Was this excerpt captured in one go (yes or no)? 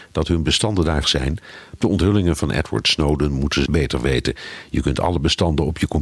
no